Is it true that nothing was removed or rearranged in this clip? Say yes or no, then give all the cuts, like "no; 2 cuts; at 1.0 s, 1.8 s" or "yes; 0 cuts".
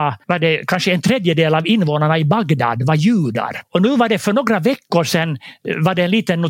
yes; 0 cuts